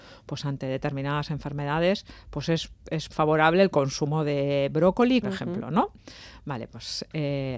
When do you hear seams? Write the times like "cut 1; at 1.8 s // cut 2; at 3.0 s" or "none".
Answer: cut 1; at 3.1 s // cut 2; at 5.2 s